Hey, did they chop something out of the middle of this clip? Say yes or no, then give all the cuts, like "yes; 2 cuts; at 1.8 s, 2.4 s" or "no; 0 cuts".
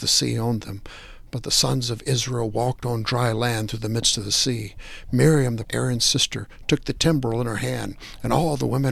yes; 1 cut; at 5.6 s